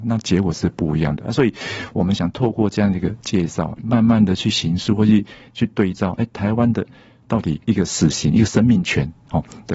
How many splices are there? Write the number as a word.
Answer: one